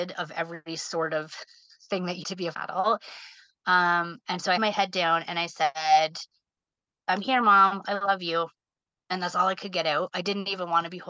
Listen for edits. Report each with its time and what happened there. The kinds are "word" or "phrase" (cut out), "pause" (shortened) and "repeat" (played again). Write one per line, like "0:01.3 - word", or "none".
0:02.2 - word
0:02.5 - word
0:04.6 - word